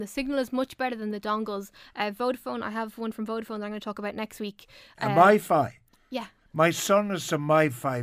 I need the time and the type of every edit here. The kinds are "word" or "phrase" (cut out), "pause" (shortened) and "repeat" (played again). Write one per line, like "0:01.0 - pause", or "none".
none